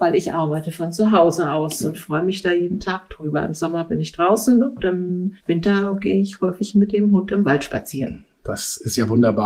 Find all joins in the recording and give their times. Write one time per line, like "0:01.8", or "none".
0:05.4